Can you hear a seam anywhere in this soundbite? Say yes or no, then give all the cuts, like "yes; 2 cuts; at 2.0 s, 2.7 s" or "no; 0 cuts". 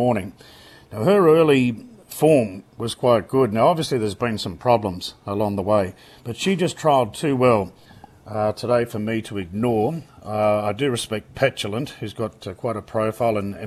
no; 0 cuts